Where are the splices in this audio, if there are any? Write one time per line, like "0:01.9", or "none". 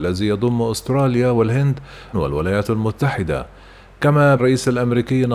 0:02.1
0:04.4